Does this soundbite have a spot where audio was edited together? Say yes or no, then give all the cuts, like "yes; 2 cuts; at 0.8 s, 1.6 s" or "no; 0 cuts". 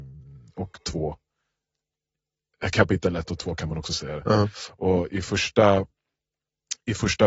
no; 0 cuts